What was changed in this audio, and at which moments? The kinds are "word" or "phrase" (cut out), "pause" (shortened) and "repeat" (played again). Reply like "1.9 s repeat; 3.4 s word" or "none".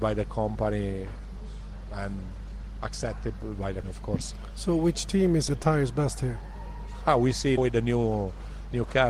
3.8 s word; 5.5 s word; 7.6 s word